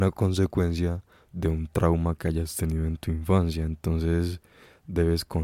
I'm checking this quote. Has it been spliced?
no; 0 cuts

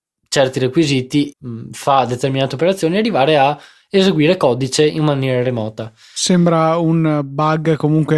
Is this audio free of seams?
no; 1 cut; at 1.3 s

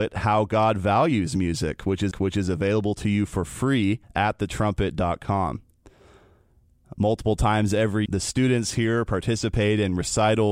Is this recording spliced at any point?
yes; 3 cuts; at 2.1 s, 4.0 s, 8.1 s

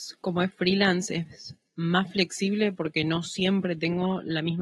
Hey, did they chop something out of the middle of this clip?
no; 0 cuts

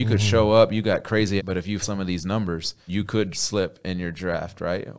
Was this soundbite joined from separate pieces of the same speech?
yes; 4 cuts; at 1.4 s, 1.8 s, 2.9 s, 3.3 s

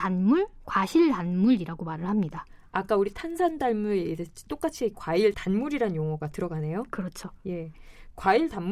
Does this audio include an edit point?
yes; 2 cuts; at 4.5 s, 5.3 s

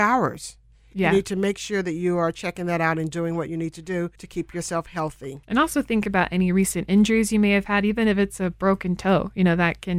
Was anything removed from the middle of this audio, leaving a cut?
yes; 2 cuts; at 4.2 s, 5.4 s

